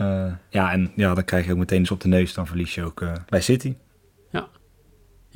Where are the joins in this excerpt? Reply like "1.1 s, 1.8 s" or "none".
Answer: 1.8 s, 3.3 s